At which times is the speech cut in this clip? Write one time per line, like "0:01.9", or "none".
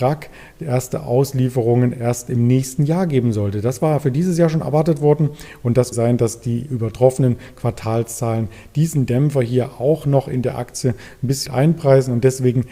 0:05.9
0:11.5